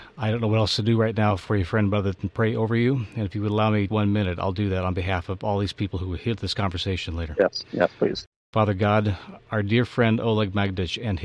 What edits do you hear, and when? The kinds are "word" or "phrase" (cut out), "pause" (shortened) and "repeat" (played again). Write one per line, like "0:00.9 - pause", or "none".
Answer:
0:03.9 - word